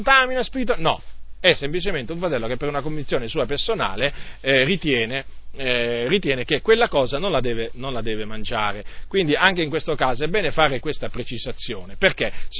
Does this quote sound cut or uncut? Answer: uncut